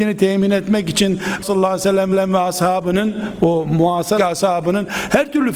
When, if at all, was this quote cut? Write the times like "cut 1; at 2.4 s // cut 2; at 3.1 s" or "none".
cut 1; at 1.4 s // cut 2; at 2.1 s // cut 3; at 4.2 s